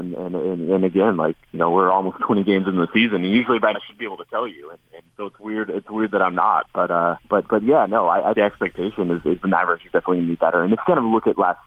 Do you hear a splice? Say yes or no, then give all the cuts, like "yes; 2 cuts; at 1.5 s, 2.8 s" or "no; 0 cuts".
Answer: yes; 5 cuts; at 1.5 s, 3.7 s, 5.1 s, 7.2 s, 8.3 s